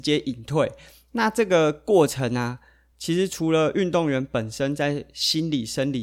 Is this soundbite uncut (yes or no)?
yes